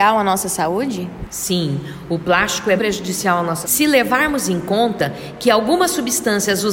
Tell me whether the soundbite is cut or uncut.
cut